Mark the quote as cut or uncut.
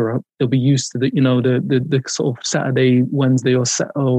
uncut